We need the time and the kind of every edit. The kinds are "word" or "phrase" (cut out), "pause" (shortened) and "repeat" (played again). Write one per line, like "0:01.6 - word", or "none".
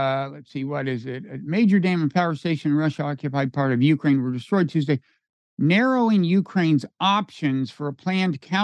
none

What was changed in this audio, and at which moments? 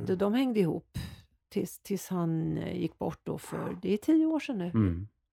none

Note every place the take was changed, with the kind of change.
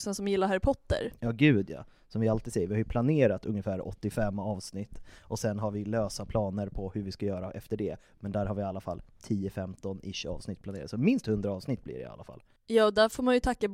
none

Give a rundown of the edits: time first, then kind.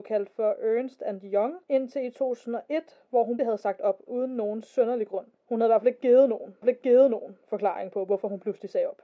0:01.6 - pause
0:03.4 - word
0:04.1 - word
0:05.3 - pause
0:06.6 - repeat

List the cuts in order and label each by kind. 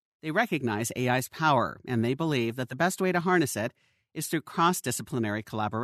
none

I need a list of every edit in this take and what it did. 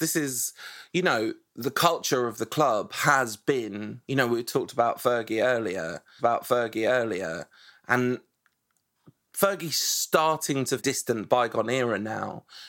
0:04.0 - pause
0:06.2 - repeat
0:10.8 - phrase

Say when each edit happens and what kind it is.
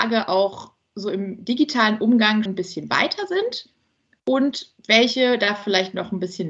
0:02.5 - word
0:04.8 - pause

